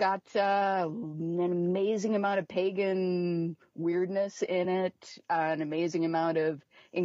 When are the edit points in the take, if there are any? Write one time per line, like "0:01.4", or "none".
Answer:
none